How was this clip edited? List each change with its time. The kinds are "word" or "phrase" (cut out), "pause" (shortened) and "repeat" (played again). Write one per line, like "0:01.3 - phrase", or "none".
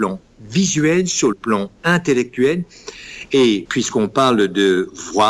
0:01.3 - word
0:03.7 - word